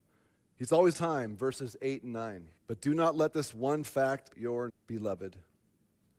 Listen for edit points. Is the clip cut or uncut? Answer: cut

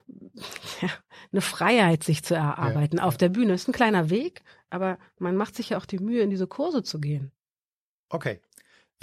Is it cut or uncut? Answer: uncut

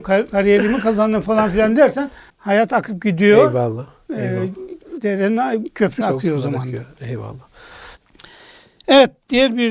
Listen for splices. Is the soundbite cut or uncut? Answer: cut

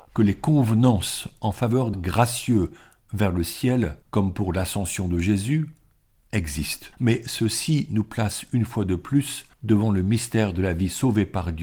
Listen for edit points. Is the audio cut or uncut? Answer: cut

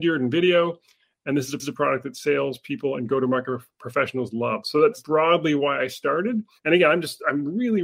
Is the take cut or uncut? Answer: cut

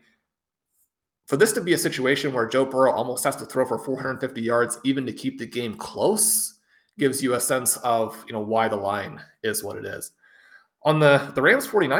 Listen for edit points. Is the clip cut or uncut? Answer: uncut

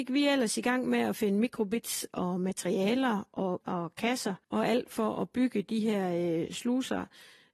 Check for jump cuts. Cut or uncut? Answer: cut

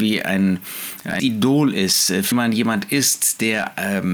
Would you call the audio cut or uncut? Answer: cut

